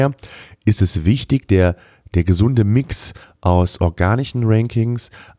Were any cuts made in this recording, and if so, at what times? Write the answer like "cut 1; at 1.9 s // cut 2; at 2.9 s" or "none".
none